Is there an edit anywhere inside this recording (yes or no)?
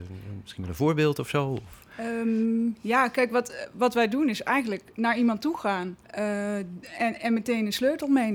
yes